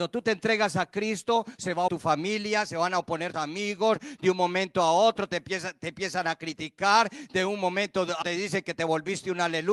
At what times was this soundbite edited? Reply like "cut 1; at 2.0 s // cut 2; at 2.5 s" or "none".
cut 1; at 1.9 s // cut 2; at 3.3 s // cut 3; at 8.2 s